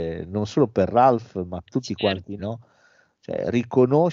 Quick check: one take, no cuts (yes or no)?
no